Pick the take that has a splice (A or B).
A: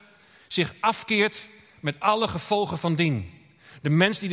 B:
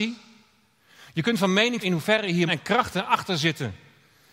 B